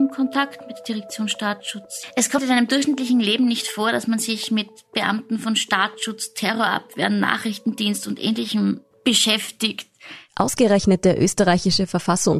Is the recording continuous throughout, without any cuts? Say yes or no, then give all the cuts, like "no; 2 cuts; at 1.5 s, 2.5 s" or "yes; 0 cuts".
no; 1 cut; at 2.4 s